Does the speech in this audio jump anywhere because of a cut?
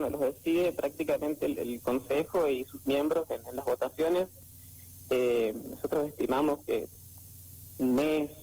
no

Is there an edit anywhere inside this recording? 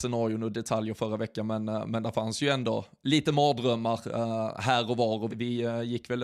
yes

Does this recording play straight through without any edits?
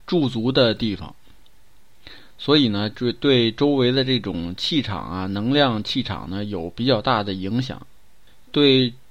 yes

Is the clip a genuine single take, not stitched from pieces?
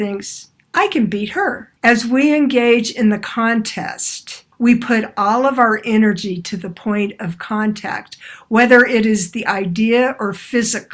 no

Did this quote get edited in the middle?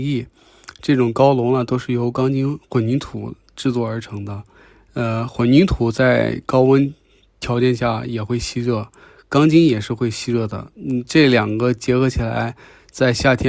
no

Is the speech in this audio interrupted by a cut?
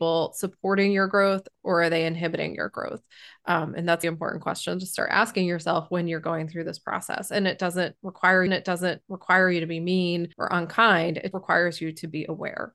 yes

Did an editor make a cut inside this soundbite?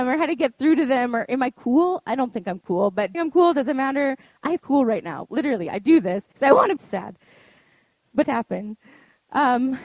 yes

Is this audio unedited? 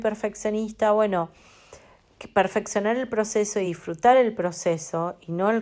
yes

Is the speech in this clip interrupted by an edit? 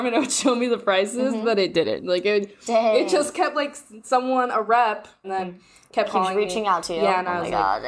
yes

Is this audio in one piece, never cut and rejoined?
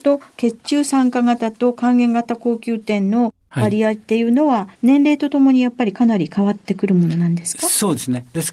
no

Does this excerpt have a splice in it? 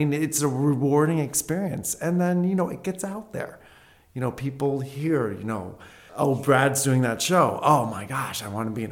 no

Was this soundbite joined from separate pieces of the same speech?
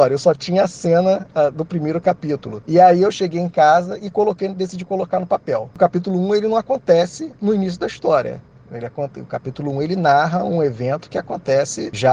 no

